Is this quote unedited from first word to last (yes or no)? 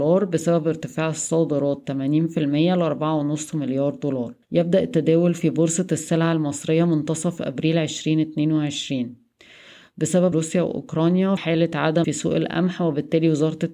no